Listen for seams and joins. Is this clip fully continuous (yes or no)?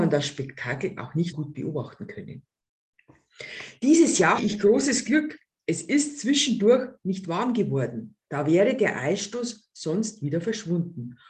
no